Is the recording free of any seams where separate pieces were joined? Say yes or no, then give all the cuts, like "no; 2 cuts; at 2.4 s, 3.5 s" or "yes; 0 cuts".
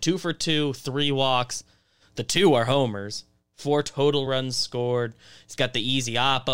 yes; 0 cuts